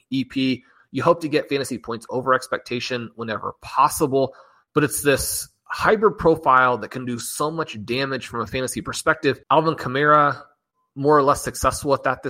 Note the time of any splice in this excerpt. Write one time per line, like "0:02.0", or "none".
0:09.4